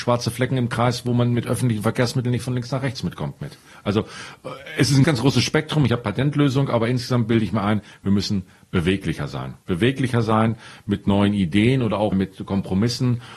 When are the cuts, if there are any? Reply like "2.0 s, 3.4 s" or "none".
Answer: 5.0 s, 6.0 s, 12.1 s